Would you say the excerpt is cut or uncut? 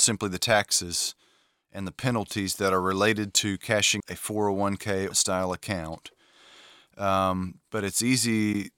cut